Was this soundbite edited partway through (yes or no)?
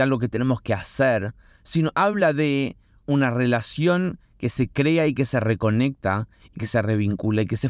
yes